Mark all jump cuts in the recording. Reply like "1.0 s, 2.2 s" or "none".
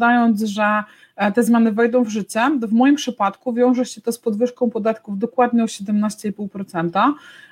none